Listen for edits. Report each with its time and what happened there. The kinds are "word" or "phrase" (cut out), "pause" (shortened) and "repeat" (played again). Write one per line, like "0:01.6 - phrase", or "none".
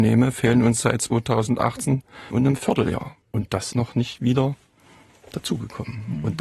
0:02.3 - phrase
0:03.2 - pause
0:03.7 - word